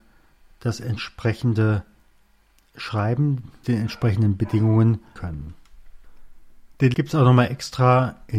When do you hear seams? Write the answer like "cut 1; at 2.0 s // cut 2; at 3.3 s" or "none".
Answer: cut 1; at 3.6 s // cut 2; at 5.2 s // cut 3; at 6.9 s